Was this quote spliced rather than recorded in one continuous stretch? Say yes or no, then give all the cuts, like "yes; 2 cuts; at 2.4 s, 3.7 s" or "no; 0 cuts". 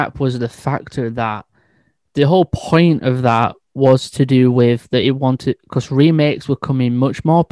no; 0 cuts